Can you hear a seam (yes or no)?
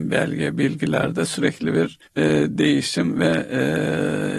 yes